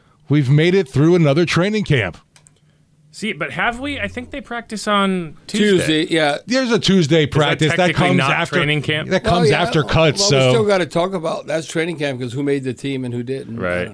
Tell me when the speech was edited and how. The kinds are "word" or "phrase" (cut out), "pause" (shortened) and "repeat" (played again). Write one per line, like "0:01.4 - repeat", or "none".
none